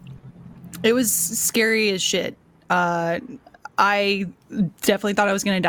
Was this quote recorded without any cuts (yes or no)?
yes